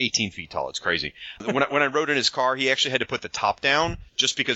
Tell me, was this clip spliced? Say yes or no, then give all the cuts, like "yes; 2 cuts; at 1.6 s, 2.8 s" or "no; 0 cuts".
no; 0 cuts